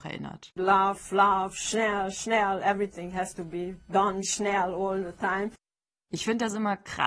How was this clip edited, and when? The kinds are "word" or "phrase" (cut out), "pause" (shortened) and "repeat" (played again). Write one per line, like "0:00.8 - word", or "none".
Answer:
none